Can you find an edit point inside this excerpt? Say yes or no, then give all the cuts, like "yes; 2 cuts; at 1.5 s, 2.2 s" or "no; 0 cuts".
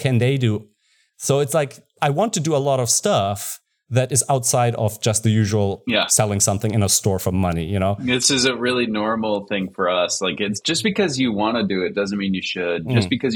no; 0 cuts